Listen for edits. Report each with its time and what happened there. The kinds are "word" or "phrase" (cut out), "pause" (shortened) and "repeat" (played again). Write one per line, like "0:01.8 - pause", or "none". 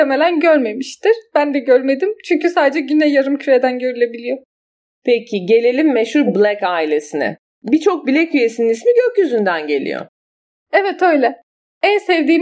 none